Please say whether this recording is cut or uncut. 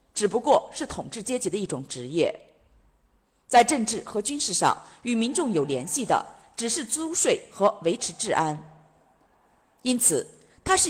uncut